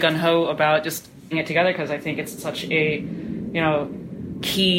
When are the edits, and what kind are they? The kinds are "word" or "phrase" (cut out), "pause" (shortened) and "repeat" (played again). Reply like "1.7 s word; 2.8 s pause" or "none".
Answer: 1.3 s word; 2.4 s word